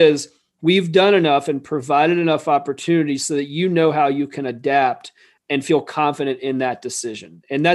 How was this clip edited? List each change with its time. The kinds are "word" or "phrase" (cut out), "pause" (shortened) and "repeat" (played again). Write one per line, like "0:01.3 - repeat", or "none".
0:05.4 - word